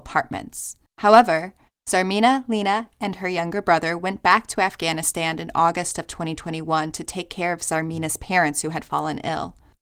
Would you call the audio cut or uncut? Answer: uncut